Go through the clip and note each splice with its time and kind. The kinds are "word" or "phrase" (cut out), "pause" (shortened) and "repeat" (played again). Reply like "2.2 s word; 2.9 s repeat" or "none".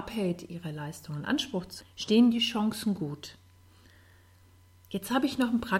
1.8 s word